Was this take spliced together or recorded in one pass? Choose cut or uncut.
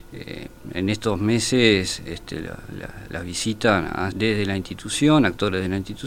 cut